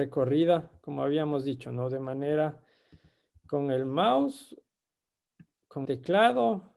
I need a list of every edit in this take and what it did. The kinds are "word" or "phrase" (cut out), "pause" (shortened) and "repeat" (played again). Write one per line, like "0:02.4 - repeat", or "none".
0:05.9 - word